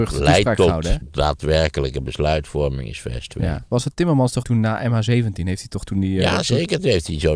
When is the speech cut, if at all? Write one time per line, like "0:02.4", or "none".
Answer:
0:01.0
0:04.4